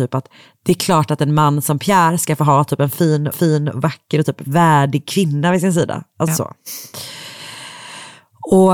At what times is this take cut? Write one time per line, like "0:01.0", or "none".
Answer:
0:03.3
0:06.3